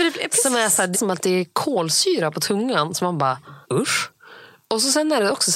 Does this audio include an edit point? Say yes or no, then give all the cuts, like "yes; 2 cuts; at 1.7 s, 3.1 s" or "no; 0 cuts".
yes; 2 cuts; at 0.9 s, 3.6 s